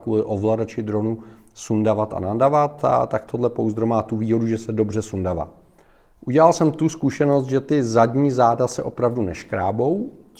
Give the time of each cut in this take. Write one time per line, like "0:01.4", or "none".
none